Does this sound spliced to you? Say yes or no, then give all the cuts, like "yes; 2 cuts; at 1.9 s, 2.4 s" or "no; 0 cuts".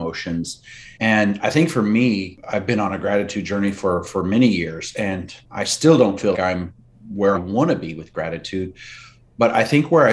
yes; 4 cuts; at 0.9 s, 5.4 s, 6.3 s, 7.3 s